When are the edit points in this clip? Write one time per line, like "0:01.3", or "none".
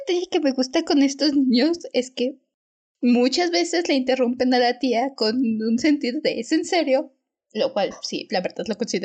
none